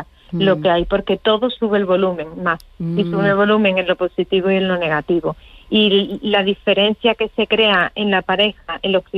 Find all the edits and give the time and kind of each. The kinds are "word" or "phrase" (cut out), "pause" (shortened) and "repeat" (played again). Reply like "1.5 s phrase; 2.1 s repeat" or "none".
none